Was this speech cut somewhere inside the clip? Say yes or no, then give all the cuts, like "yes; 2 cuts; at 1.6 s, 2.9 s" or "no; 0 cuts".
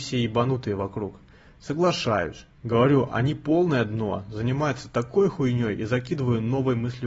no; 0 cuts